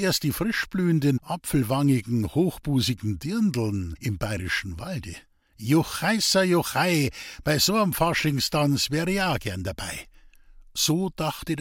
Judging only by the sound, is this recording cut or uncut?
cut